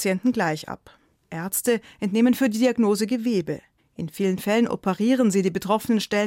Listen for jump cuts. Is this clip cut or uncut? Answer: uncut